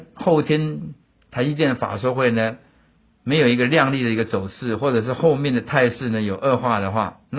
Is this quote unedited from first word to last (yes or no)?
yes